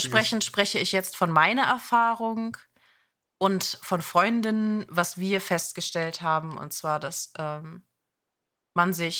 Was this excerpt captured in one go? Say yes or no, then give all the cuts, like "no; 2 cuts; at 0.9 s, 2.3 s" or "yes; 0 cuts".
yes; 0 cuts